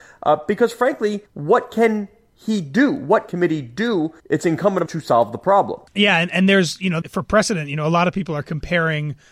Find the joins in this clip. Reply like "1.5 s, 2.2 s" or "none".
1.3 s, 3.3 s, 4.2 s, 4.9 s, 5.9 s, 7.0 s